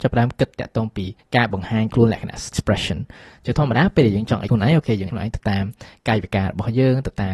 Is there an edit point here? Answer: yes; 4 cuts; at 1.2 s, 2.5 s, 4.5 s, 5.1 s

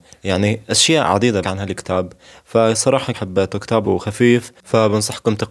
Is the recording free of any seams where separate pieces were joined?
no; 3 cuts; at 1.4 s, 3.1 s, 3.8 s

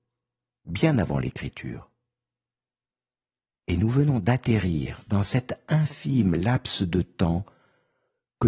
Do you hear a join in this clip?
no; 0 cuts

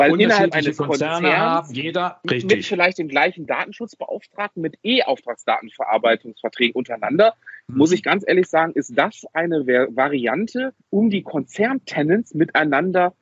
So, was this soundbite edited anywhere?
yes; 1 cut; at 10.8 s

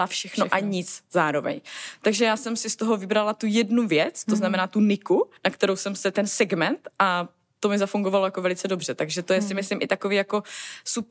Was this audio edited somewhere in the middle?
yes; 1 cut; at 5.4 s

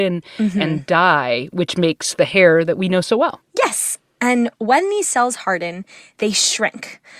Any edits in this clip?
no; 0 cuts

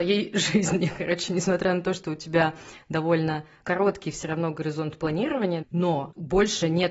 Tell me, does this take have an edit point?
no; 0 cuts

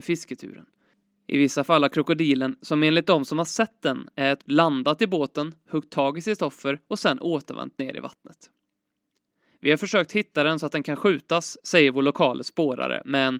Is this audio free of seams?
no; 1 cut; at 4.4 s

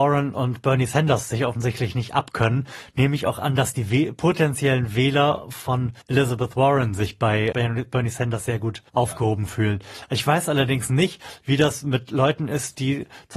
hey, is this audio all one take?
no; 3 cuts; at 6.0 s, 7.5 s, 8.9 s

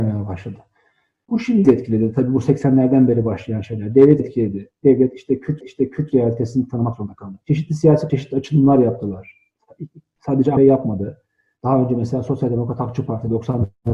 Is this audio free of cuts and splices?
no; 6 cuts; at 1.6 s, 4.2 s, 5.6 s, 7.4 s, 8.1 s, 10.6 s

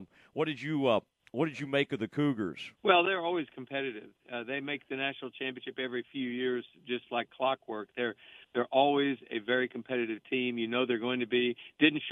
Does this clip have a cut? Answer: yes; 1 cut; at 2.8 s

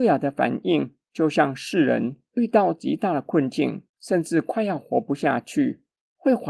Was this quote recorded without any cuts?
no; 1 cut; at 3.9 s

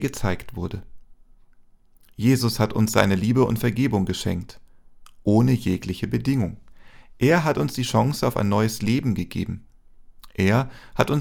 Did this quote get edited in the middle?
no; 0 cuts

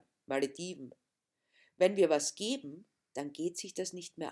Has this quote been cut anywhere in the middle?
no; 0 cuts

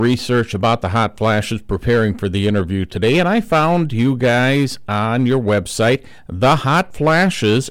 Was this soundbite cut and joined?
no; 0 cuts

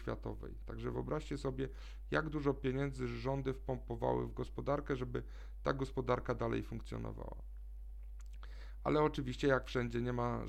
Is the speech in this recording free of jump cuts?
yes; 0 cuts

